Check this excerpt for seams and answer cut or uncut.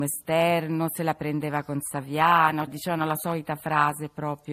cut